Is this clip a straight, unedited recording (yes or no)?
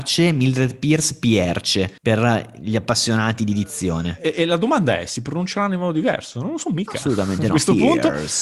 no